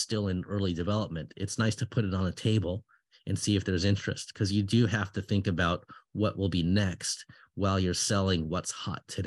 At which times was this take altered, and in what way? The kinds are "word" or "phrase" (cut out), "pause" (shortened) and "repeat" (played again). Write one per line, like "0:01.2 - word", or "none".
none